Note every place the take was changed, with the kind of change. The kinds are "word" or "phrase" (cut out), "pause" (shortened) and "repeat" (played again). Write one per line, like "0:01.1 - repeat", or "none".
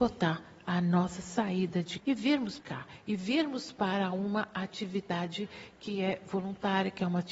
0:02.0 - word
0:02.6 - word